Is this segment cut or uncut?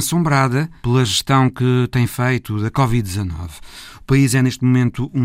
uncut